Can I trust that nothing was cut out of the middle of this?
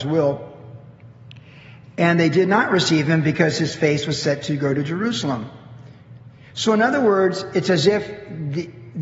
yes; 0 cuts

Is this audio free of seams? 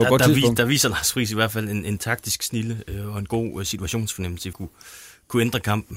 no; 1 cut; at 4.5 s

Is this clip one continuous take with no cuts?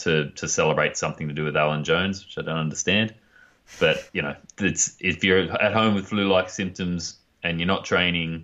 no; 1 cut; at 4.1 s

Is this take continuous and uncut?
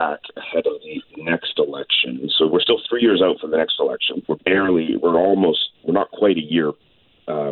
no; 2 cuts; at 4.2 s, 5.8 s

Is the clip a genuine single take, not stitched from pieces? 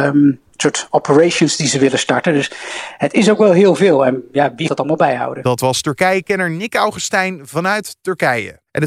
no; 1 cut; at 4.7 s

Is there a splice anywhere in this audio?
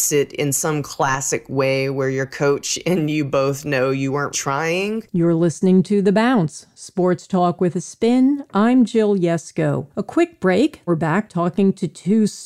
yes; 4 cuts; at 4.3 s, 5.1 s, 9.9 s, 10.9 s

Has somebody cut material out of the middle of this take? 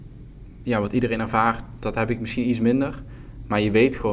no; 0 cuts

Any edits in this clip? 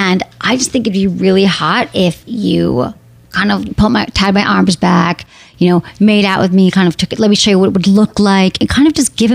yes; 2 cuts; at 2.2 s, 3.7 s

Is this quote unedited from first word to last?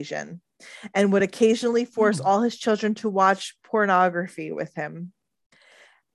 yes; 0 cuts

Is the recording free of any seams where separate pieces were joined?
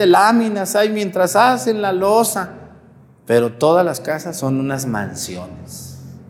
yes; 0 cuts

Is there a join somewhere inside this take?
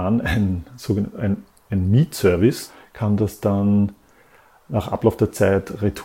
no; 0 cuts

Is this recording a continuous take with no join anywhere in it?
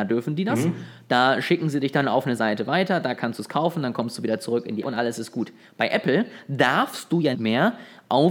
no; 3 cuts; at 2.4 s, 4.8 s, 7.3 s

